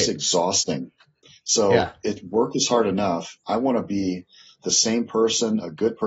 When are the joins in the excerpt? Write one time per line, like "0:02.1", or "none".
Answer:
none